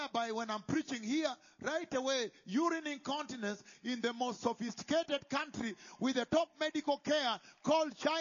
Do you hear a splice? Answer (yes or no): no